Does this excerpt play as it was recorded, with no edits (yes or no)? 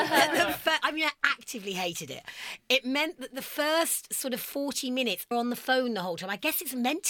no